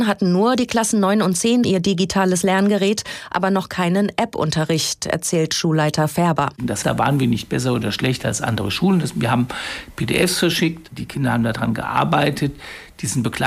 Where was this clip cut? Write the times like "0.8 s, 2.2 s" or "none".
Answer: 1.6 s, 6.8 s